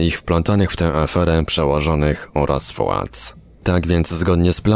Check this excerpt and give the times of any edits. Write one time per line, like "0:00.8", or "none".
none